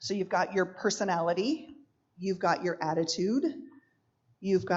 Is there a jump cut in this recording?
no; 0 cuts

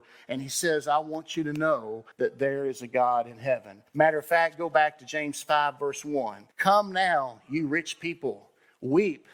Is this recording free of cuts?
no; 3 cuts; at 2.1 s, 3.9 s, 6.5 s

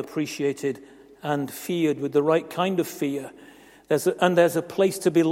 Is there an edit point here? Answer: no; 0 cuts

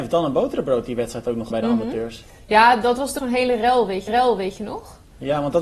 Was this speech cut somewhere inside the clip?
yes; 3 cuts; at 1.5 s, 3.2 s, 4.1 s

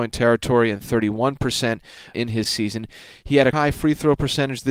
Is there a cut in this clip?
yes; 3 cuts; at 2.1 s, 2.4 s, 3.5 s

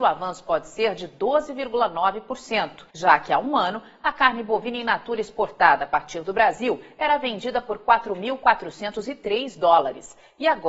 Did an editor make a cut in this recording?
yes; 1 cut; at 2.9 s

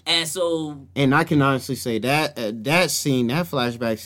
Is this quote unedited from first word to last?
yes; 0 cuts

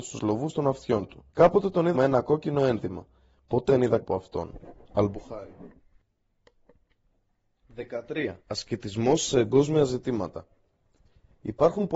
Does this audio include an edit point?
yes; 5 cuts; at 1.3 s, 1.9 s, 3.7 s, 4.0 s, 8.4 s

